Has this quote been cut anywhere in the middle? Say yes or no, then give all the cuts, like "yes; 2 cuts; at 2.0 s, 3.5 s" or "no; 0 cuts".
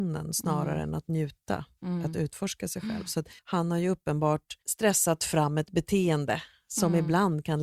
yes; 2 cuts; at 3.4 s, 4.6 s